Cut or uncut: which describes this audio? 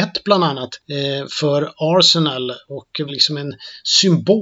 cut